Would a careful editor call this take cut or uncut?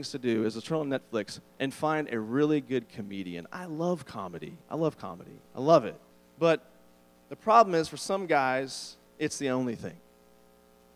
cut